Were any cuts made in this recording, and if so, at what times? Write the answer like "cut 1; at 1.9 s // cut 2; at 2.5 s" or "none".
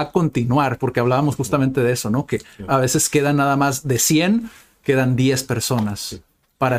none